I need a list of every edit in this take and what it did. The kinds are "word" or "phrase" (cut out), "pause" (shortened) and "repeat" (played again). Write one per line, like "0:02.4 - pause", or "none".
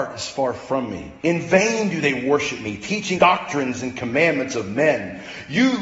0:01.2 - pause
0:03.2 - word